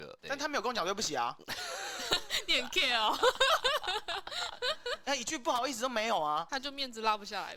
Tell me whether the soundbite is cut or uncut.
uncut